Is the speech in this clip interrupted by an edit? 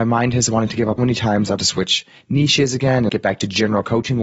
yes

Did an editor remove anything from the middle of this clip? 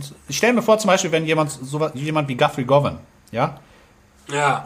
no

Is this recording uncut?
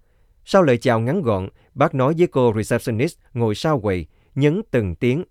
yes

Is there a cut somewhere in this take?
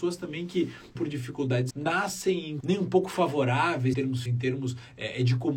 yes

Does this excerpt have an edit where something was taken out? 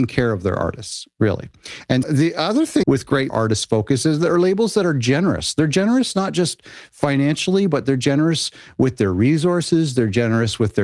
yes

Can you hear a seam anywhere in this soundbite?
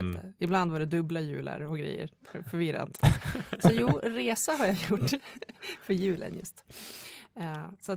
no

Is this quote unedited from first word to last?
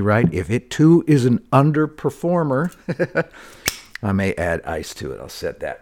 yes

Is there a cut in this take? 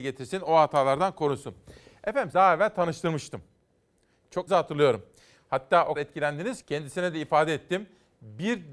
yes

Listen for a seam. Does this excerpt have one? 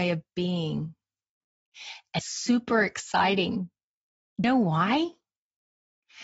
yes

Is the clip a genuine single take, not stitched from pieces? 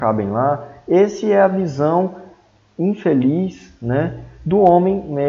yes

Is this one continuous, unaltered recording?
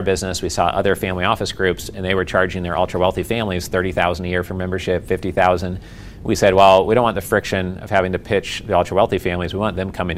yes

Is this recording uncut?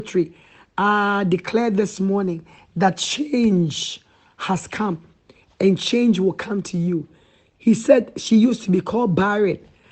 yes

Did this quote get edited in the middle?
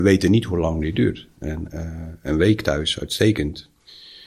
no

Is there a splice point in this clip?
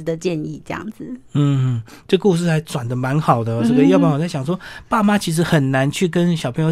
no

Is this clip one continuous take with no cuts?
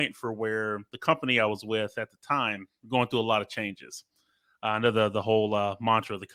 yes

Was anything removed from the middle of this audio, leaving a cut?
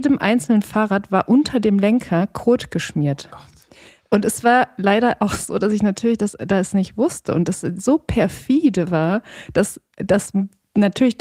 no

